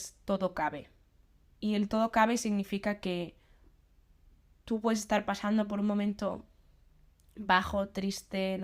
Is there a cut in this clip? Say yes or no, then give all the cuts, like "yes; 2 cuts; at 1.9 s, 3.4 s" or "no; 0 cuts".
no; 0 cuts